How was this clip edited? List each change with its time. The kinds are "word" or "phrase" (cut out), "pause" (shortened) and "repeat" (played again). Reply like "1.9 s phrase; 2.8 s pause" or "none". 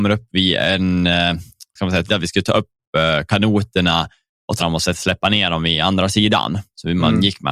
1.8 s word; 2.1 s word; 4.6 s word